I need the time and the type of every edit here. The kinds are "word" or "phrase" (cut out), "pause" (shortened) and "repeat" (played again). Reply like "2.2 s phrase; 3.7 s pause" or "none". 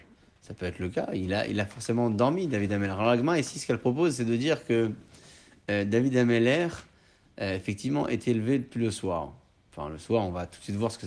none